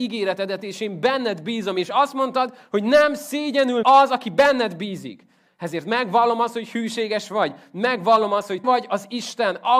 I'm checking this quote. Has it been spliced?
yes; 2 cuts; at 3.8 s, 8.6 s

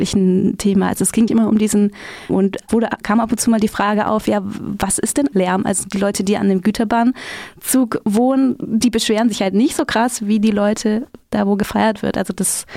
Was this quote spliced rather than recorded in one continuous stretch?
yes; 4 cuts; at 1.3 s, 2.3 s, 2.7 s, 5.3 s

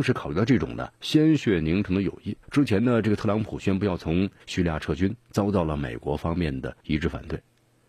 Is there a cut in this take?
yes; 4 cuts; at 1.0 s, 2.4 s, 4.4 s, 6.8 s

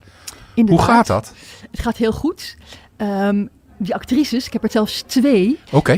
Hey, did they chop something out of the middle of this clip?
no; 0 cuts

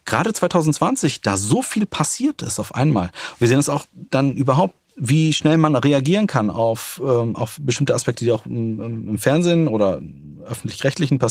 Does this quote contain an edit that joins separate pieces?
no; 0 cuts

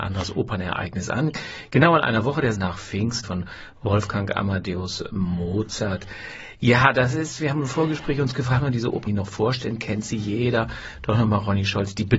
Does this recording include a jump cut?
yes; 4 cuts; at 2.5 s, 3.2 s, 8.6 s, 9.1 s

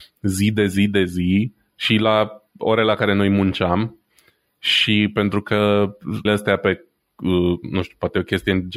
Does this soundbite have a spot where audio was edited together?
yes; 1 cut; at 6.2 s

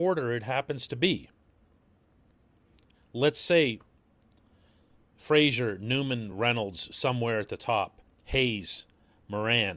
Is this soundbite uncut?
yes; 0 cuts

